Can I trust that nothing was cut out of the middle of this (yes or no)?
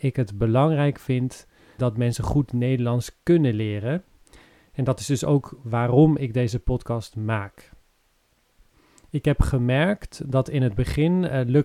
no